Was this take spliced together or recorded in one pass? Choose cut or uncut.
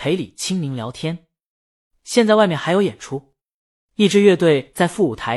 uncut